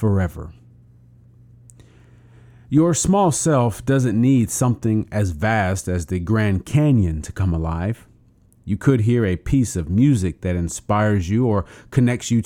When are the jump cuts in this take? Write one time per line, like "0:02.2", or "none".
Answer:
none